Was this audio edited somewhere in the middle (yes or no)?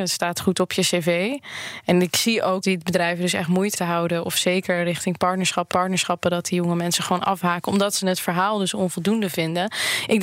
yes